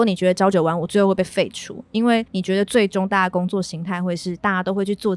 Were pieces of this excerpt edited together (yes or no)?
yes